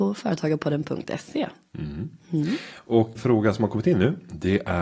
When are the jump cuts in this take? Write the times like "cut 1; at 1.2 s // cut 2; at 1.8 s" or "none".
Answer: cut 1; at 3.1 s